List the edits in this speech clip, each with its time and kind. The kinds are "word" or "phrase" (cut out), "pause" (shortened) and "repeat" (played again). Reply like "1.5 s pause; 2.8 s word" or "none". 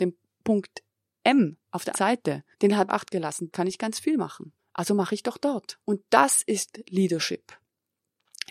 1.6 s pause; 1.9 s word; 2.5 s pause; 2.9 s phrase; 3.5 s word; 4.6 s pause; 5.8 s pause